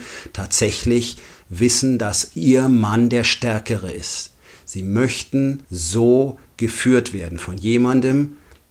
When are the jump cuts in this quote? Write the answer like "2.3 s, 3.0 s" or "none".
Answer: 5.6 s